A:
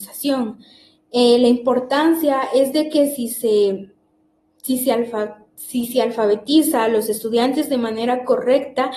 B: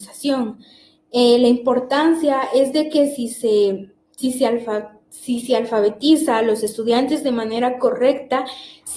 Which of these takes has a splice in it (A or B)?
B